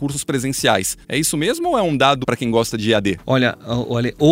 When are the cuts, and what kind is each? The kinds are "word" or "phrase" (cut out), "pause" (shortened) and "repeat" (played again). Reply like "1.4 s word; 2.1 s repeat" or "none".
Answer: 1.0 s pause; 2.2 s word